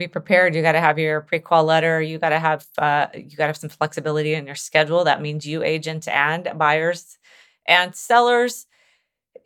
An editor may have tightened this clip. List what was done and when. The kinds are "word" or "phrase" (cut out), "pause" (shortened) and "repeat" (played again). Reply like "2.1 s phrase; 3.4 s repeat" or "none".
none